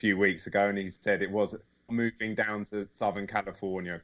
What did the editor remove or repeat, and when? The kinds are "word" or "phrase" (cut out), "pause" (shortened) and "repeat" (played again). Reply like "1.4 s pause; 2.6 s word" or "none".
1.9 s phrase